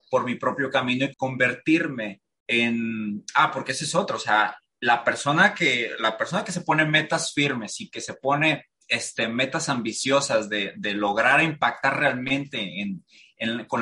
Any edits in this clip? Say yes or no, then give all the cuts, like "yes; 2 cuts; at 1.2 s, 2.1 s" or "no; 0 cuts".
yes; 2 cuts; at 1.1 s, 8.8 s